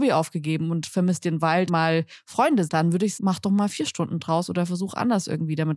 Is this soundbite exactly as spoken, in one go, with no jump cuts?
no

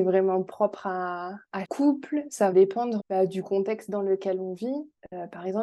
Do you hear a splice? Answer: yes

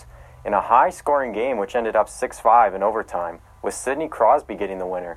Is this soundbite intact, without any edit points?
yes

